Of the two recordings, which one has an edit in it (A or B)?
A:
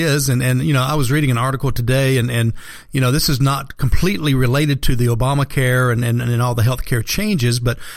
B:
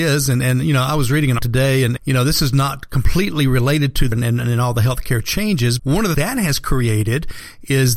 B